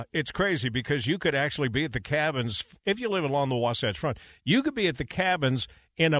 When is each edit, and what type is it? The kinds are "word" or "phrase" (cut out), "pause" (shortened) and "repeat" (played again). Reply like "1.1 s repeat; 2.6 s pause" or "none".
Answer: none